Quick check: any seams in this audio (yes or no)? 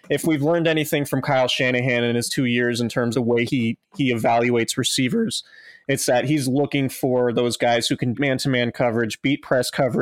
yes